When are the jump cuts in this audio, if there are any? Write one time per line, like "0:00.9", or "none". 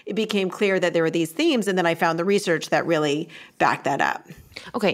none

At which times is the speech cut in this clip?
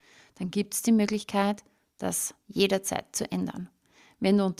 none

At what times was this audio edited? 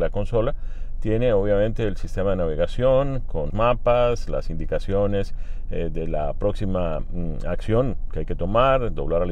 0:03.5

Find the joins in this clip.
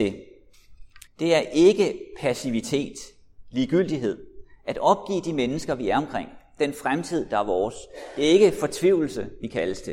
0:01.1

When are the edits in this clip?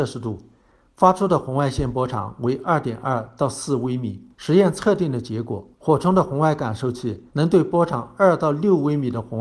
0:04.3
0:05.7
0:07.3

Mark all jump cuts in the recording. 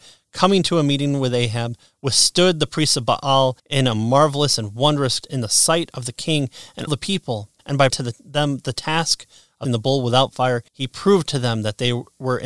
0:03.6
0:05.2
0:06.9
0:07.6
0:07.9
0:09.6
0:10.7

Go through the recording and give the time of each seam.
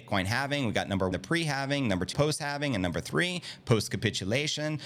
0:01.1
0:02.1

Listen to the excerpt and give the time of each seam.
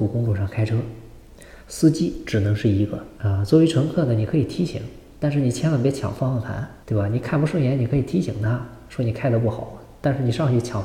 0:01.6
0:03.2
0:05.1
0:06.8

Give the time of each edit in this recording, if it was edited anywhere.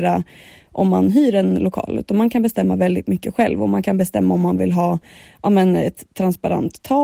none

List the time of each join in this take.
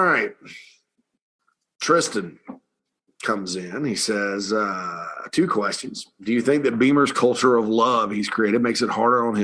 none

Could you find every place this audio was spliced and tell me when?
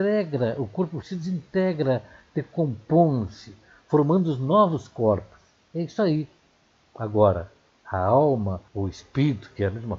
0:01.0
0:08.7

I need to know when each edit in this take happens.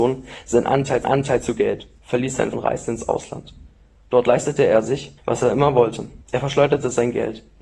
0:01.0
0:02.5
0:05.2
0:06.2

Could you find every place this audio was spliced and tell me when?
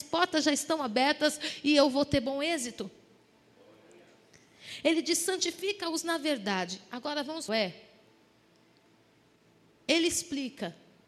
0:07.5

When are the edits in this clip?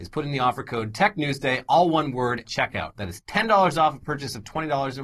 0:02.4

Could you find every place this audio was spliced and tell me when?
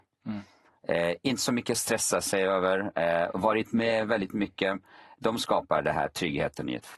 none

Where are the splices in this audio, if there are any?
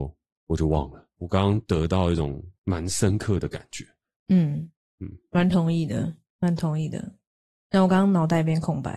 0:01.2
0:02.6

